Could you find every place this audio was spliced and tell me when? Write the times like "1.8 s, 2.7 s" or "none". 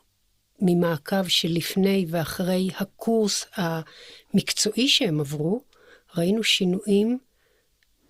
none